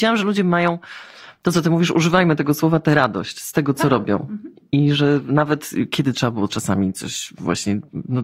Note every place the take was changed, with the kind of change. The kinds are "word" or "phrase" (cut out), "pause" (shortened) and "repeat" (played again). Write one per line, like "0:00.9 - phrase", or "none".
none